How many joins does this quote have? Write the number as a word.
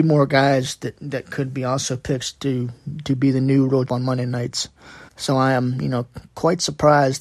two